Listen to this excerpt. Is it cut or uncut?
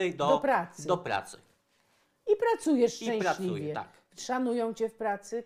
uncut